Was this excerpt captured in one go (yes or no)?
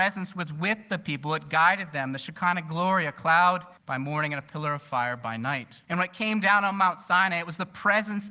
no